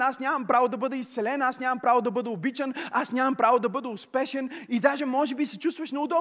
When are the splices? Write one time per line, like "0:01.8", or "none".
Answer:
none